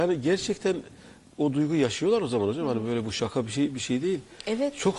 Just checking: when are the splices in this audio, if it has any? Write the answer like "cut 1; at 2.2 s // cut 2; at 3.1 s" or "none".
none